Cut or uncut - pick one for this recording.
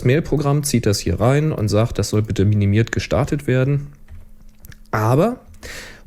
uncut